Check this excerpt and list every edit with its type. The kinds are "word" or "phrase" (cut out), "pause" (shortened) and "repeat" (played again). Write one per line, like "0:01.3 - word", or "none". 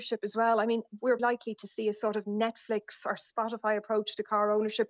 0:01.2 - word